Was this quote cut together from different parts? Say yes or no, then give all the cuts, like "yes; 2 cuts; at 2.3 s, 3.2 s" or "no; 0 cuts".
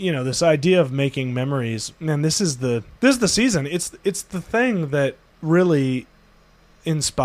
yes; 2 cuts; at 3.0 s, 5.3 s